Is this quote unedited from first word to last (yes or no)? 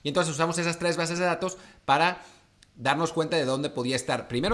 yes